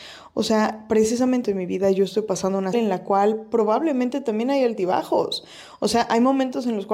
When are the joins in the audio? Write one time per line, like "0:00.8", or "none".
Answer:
0:01.4
0:02.7